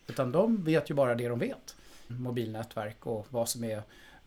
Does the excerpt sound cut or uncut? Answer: cut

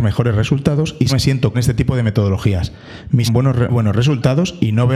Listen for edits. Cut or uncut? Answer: cut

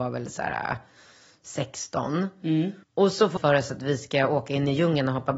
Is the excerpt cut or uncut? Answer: cut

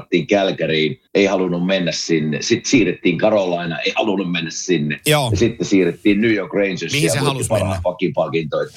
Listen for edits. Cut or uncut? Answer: cut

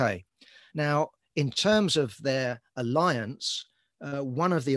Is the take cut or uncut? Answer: uncut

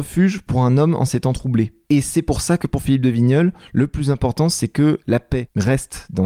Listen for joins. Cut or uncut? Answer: uncut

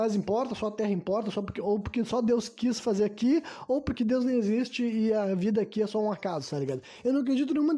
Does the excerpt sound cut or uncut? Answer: uncut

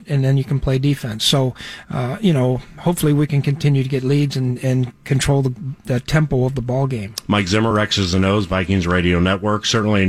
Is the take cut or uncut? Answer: uncut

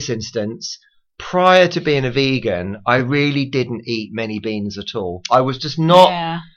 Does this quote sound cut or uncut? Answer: uncut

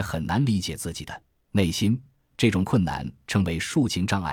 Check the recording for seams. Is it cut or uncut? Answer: uncut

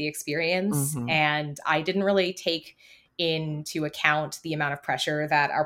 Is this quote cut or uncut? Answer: uncut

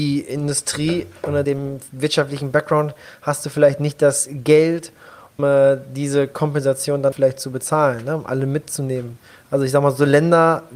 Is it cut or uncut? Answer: cut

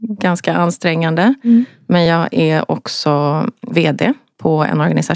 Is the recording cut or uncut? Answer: uncut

